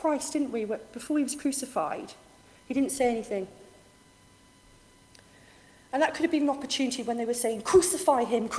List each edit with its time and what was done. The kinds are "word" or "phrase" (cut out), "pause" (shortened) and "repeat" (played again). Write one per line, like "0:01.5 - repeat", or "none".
none